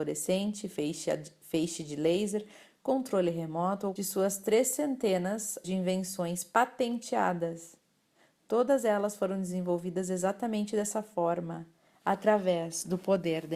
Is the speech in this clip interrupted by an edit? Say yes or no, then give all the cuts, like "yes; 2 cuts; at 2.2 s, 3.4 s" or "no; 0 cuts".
yes; 2 cuts; at 4.0 s, 5.6 s